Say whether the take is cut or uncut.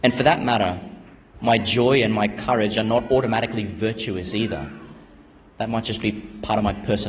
uncut